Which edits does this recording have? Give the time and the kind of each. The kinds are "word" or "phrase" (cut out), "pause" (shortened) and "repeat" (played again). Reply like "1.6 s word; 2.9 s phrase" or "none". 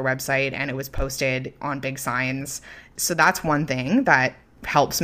none